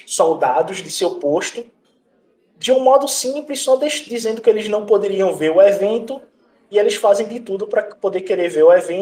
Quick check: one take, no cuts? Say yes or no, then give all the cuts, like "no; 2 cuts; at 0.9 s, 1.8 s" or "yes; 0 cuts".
yes; 0 cuts